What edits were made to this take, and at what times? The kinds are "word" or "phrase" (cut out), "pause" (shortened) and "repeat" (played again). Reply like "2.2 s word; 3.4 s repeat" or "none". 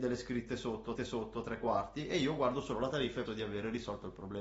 1.0 s repeat; 3.3 s word